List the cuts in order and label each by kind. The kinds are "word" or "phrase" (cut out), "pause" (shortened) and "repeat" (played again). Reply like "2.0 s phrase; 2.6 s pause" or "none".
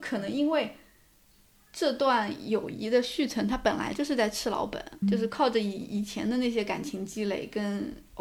5.0 s word